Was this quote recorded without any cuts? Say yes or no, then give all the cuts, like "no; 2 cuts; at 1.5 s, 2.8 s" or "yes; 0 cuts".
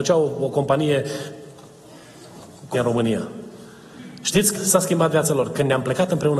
no; 2 cuts; at 2.7 s, 4.5 s